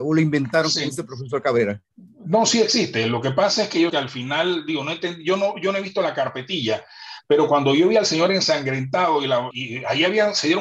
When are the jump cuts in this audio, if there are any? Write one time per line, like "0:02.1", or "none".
0:03.9
0:09.5